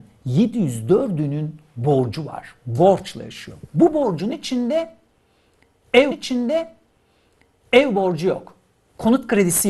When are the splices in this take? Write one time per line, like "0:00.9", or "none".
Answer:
0:06.1